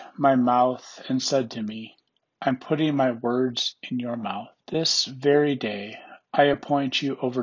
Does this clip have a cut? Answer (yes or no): yes